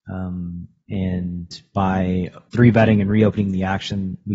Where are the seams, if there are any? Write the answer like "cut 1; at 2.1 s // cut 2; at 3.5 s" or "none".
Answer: cut 1; at 2.5 s

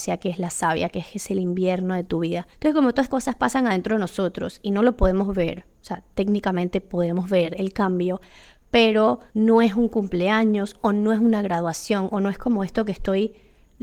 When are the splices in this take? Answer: cut 1; at 2.5 s // cut 2; at 3.1 s // cut 3; at 9.3 s

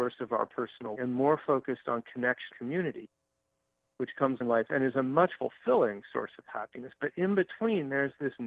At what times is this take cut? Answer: cut 1; at 0.9 s // cut 2; at 2.5 s // cut 3; at 4.4 s // cut 4; at 5.4 s

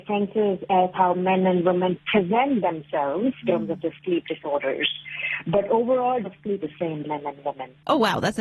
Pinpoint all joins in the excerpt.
cut 1; at 0.9 s // cut 2; at 3.4 s // cut 3; at 6.2 s // cut 4; at 6.6 s // cut 5; at 7.0 s

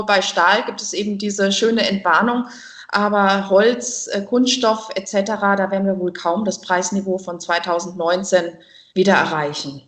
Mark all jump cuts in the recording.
none

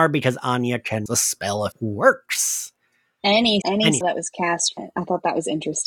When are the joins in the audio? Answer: cut 1; at 1.1 s // cut 2; at 1.7 s // cut 3; at 3.6 s // cut 4; at 4.0 s // cut 5; at 4.8 s

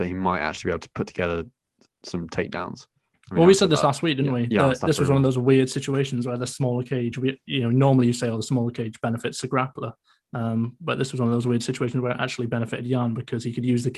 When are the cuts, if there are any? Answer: none

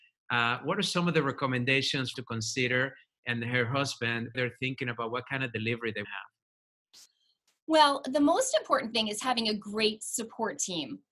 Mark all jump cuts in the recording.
cut 1; at 2.1 s // cut 2; at 4.3 s // cut 3; at 6.0 s

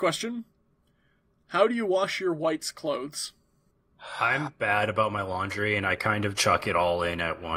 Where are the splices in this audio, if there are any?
cut 1; at 6.4 s

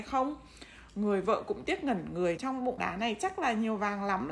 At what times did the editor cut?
cut 1; at 2.4 s // cut 2; at 2.8 s

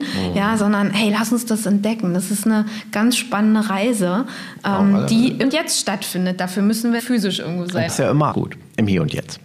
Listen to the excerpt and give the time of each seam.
cut 1; at 5.4 s // cut 2; at 7.0 s // cut 3; at 7.9 s // cut 4; at 8.3 s

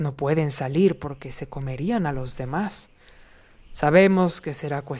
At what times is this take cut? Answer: none

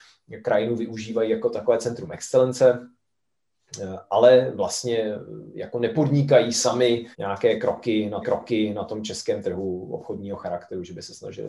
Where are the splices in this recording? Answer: cut 1; at 7.1 s // cut 2; at 8.2 s

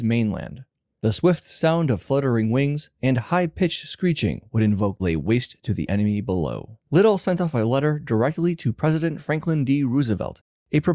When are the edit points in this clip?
cut 1; at 5.0 s // cut 2; at 6.8 s

